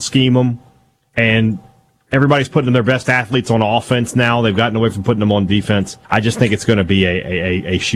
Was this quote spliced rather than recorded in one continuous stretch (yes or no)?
yes